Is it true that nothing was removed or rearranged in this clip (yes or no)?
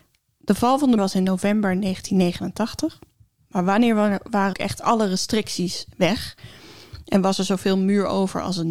no